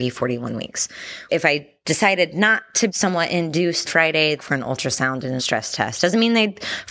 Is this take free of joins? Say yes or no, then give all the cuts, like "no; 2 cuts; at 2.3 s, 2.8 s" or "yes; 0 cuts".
no; 5 cuts; at 1.3 s, 2.9 s, 3.8 s, 4.4 s, 5.4 s